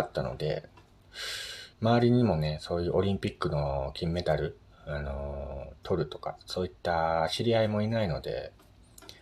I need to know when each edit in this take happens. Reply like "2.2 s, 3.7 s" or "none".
1.7 s